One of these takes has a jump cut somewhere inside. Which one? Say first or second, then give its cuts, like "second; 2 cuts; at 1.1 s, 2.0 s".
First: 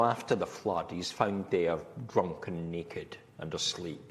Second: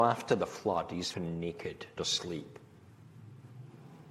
second; 2 cuts; at 1.1 s, 2.0 s